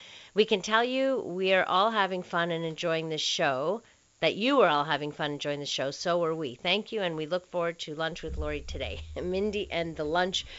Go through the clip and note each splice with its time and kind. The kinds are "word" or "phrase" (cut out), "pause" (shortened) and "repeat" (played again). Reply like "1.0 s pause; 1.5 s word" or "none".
none